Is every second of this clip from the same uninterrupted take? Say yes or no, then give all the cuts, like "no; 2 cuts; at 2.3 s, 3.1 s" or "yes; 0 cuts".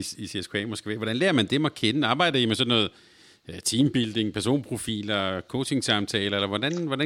yes; 0 cuts